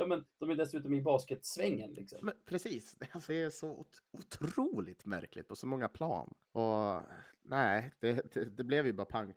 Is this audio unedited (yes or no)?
no